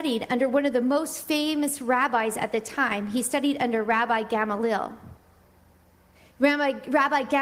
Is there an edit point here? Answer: no; 0 cuts

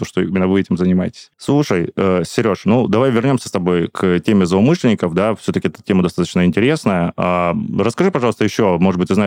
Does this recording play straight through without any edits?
yes; 0 cuts

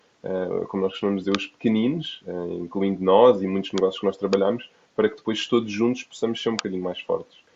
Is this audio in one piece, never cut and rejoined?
yes; 0 cuts

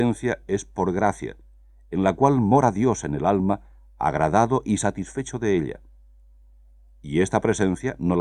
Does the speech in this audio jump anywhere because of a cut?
no; 0 cuts

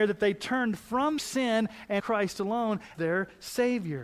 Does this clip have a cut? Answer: yes; 3 cuts; at 1.2 s, 2.0 s, 2.9 s

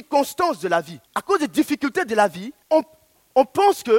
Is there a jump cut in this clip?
yes; 2 cuts; at 1.1 s, 2.6 s

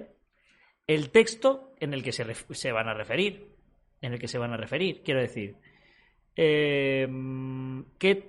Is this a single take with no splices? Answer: yes; 0 cuts

